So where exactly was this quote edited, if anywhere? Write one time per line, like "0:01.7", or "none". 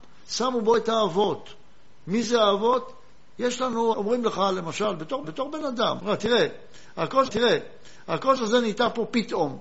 0:03.9
0:05.2
0:06.0
0:07.3